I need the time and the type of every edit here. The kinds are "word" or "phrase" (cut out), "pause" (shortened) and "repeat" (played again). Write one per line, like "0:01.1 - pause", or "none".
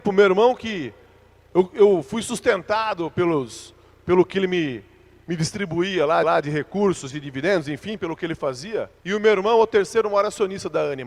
0:06.2 - repeat
0:09.0 - pause